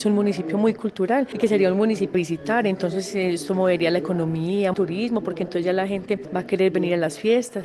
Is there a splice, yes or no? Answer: yes